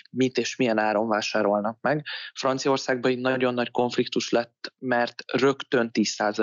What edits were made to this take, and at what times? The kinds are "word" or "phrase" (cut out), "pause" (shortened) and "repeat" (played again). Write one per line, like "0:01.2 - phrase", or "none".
none